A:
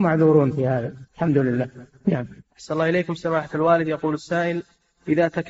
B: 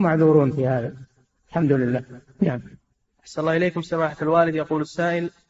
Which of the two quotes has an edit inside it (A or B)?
A